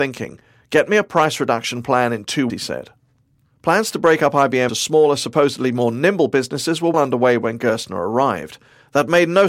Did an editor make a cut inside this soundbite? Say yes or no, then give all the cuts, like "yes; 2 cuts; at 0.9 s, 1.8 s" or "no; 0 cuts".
yes; 3 cuts; at 2.5 s, 4.7 s, 6.9 s